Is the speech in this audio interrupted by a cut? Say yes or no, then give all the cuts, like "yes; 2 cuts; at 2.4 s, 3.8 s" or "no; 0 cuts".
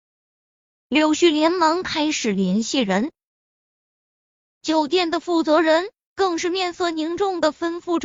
no; 0 cuts